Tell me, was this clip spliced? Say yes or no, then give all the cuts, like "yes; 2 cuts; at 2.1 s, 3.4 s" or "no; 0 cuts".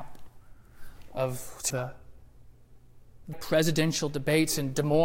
yes; 2 cuts; at 1.7 s, 3.3 s